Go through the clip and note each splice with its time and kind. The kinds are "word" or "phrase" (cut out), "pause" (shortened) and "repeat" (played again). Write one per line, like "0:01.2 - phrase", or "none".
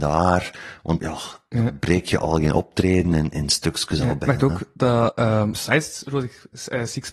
0:01.0 - word
0:05.5 - word